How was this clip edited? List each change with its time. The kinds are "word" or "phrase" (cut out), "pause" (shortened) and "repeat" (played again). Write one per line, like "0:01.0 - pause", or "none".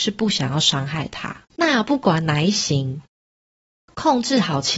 0:01.5 - pause